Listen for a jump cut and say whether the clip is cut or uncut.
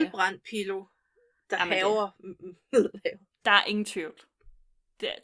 uncut